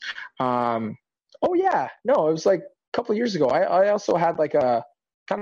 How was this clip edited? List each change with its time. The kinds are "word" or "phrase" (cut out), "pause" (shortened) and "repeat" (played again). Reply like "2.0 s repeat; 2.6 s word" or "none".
none